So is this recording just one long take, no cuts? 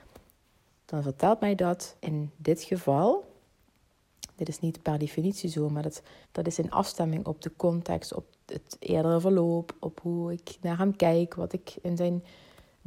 no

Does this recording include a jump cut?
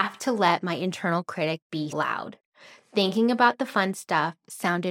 yes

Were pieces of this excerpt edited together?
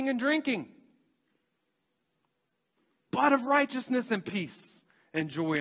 no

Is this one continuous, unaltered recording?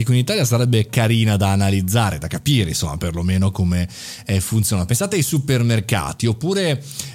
yes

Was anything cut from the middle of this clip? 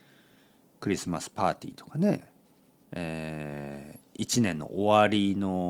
no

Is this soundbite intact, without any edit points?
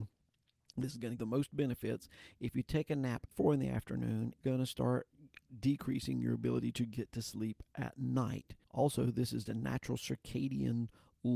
no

